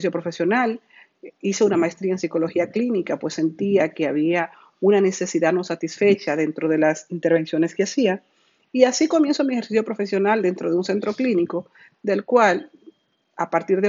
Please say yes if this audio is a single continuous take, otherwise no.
yes